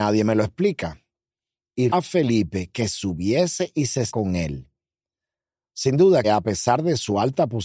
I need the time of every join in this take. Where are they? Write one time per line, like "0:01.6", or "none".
0:01.9
0:02.9
0:04.1
0:06.2